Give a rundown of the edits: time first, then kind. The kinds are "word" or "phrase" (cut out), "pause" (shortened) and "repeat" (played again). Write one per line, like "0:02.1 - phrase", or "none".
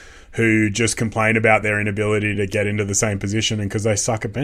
none